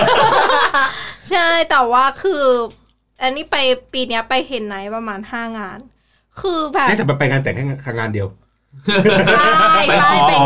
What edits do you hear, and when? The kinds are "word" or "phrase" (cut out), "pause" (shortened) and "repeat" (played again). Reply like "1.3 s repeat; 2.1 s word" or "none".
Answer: none